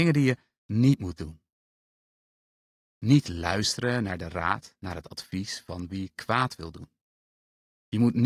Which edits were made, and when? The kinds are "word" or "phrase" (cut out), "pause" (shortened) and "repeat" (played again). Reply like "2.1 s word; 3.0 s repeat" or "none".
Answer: none